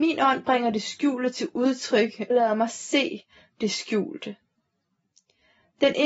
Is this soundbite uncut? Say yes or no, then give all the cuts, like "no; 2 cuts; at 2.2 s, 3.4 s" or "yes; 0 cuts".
no; 1 cut; at 2.3 s